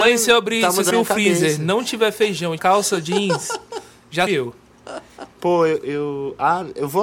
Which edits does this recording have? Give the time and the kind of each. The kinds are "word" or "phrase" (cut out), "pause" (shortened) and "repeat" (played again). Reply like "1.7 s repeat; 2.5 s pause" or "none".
0.9 s word; 2.6 s phrase; 4.3 s phrase; 5.3 s pause; 5.8 s word